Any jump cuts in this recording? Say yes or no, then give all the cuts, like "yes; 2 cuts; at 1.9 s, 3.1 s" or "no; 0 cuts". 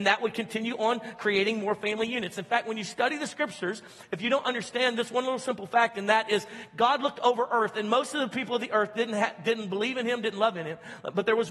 no; 0 cuts